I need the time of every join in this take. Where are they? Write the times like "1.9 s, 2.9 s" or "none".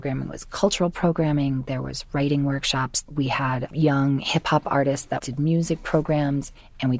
none